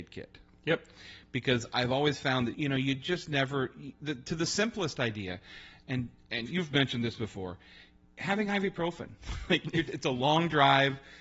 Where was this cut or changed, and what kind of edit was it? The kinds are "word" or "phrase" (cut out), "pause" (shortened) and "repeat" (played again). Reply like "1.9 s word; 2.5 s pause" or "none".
2.5 s word; 6.5 s word